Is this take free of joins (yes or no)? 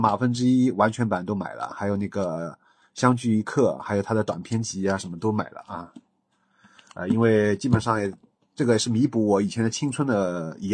yes